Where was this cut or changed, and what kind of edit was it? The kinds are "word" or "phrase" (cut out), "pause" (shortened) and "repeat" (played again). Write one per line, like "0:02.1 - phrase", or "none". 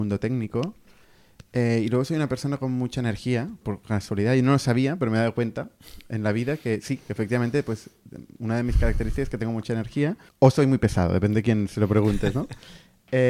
0:03.6 - word
0:10.3 - pause